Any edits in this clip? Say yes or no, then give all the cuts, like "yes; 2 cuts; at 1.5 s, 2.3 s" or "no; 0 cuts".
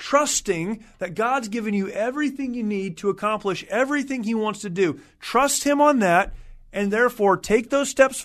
no; 0 cuts